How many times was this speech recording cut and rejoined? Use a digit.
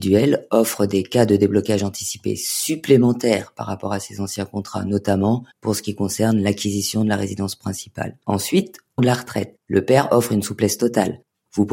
3